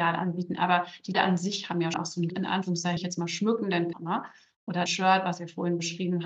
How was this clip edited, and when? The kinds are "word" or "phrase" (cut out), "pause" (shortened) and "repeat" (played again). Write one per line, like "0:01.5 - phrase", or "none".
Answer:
0:01.1 - word
0:01.9 - word
0:02.3 - word
0:03.0 - word
0:03.9 - word
0:04.9 - word